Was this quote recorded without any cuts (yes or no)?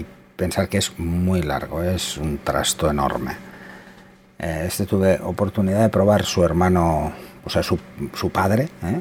yes